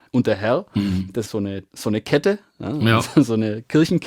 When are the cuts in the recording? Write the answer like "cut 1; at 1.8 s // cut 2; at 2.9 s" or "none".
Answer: cut 1; at 1.3 s // cut 2; at 1.7 s